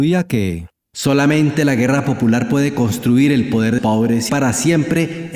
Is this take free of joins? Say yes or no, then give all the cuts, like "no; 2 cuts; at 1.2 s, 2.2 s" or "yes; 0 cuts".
no; 2 cuts; at 3.8 s, 4.3 s